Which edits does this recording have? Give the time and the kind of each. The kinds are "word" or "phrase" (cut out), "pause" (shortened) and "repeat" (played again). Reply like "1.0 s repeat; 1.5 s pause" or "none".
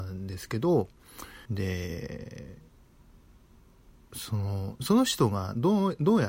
1.5 s pause